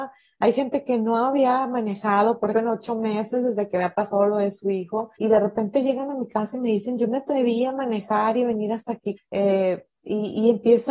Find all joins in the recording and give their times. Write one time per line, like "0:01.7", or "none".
0:02.5
0:05.2
0:09.2